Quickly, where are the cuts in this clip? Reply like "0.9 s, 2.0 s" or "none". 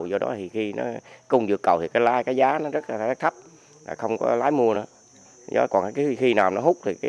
none

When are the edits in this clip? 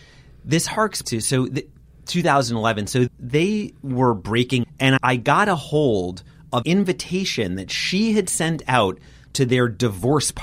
1.0 s, 3.1 s, 4.6 s, 5.0 s, 6.6 s

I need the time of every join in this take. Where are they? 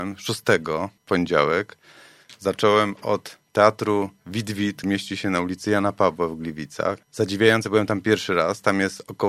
1.0 s, 4.8 s, 7.0 s

